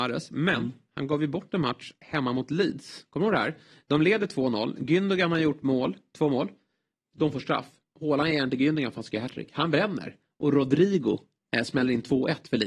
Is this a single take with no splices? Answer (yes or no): yes